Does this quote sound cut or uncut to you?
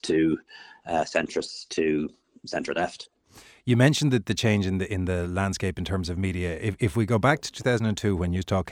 uncut